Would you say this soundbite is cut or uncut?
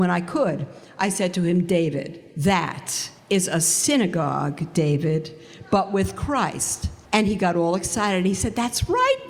cut